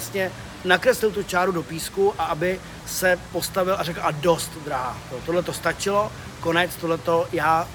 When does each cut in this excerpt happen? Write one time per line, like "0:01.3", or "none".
none